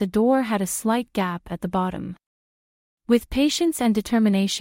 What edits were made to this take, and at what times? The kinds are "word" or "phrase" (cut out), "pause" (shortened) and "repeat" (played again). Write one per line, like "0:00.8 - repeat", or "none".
none

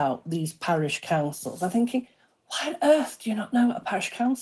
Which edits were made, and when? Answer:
none

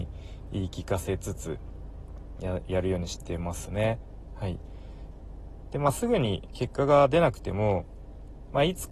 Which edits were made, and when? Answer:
0:02.4 - phrase

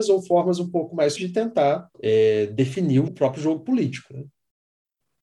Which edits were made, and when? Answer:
0:01.2 - word
0:01.9 - pause
0:03.1 - word

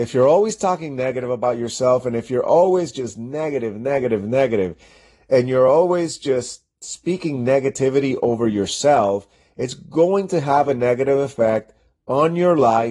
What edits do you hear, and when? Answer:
none

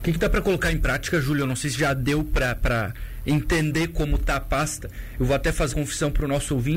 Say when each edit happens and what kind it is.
0:05.7 - word

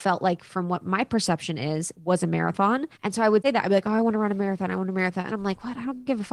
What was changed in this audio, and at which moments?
0:02.0 - pause
0:03.0 - pause
0:03.4 - word
0:05.3 - word

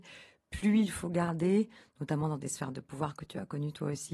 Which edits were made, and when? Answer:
none

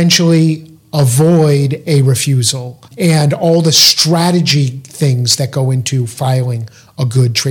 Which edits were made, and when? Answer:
0:02.9 - pause

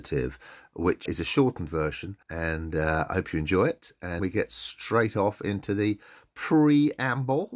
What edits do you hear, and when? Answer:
0:01.1 - word
0:02.2 - pause
0:04.2 - word

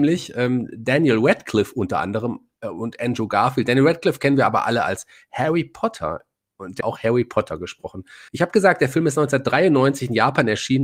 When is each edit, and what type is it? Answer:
0:06.8 - phrase
0:08.3 - pause

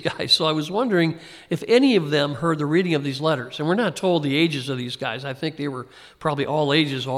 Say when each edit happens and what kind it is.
none

